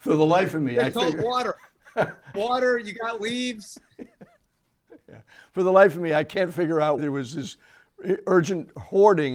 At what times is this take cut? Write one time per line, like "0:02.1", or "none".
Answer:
0:00.9
0:02.3
0:07.0